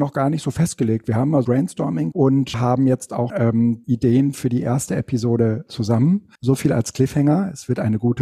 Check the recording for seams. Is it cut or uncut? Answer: cut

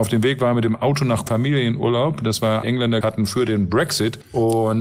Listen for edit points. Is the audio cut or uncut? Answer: cut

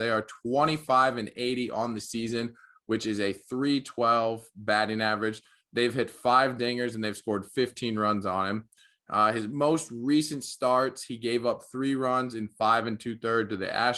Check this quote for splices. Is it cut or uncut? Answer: uncut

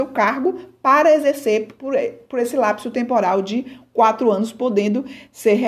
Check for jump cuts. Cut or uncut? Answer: uncut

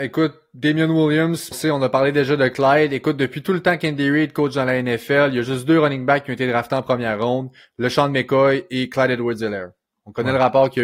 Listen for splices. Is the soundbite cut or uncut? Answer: cut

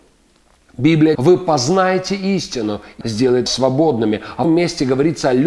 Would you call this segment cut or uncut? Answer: cut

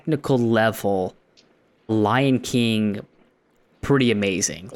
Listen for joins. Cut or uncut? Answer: cut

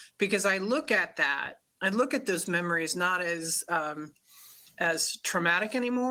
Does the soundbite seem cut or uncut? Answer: uncut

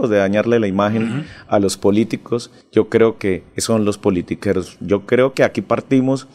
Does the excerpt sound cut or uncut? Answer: uncut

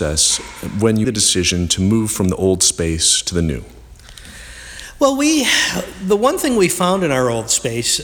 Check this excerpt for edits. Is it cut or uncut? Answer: cut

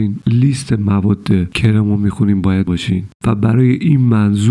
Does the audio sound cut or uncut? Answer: cut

